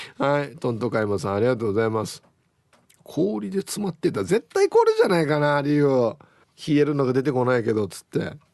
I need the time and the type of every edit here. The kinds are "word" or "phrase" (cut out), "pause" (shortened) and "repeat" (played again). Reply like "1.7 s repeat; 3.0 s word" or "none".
2.8 s pause; 6.4 s pause